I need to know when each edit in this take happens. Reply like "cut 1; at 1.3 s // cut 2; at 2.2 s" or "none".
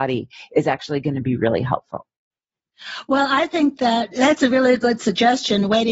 none